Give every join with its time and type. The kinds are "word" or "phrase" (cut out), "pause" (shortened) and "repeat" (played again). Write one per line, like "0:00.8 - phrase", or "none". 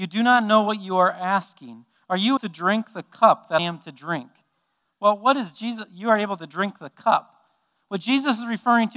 0:02.4 - word
0:03.6 - word